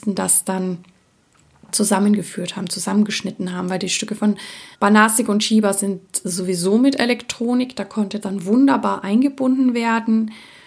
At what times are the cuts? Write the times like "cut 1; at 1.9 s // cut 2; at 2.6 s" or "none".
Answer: cut 1; at 4.7 s // cut 2; at 8.2 s